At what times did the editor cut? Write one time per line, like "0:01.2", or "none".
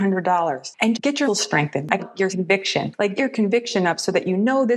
0:00.9
0:01.3
0:02.0
0:02.3
0:03.2